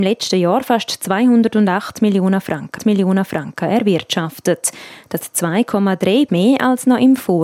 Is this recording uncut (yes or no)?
no